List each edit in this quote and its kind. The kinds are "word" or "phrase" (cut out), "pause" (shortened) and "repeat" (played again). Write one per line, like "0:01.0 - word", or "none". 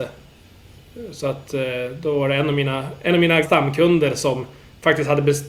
0:03.4 - word